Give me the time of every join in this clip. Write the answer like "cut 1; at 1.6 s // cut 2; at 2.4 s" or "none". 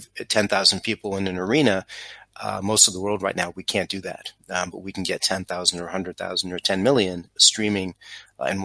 cut 1; at 7.4 s